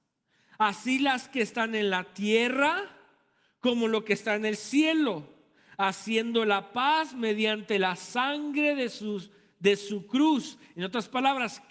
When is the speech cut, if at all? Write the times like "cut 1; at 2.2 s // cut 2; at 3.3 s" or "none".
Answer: none